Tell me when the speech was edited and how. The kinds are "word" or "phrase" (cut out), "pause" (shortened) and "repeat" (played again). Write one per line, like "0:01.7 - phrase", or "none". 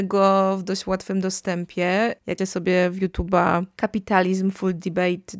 0:02.4 - word